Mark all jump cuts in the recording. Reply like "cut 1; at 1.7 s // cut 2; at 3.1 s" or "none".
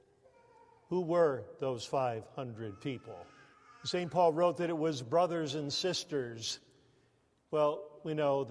cut 1; at 3.5 s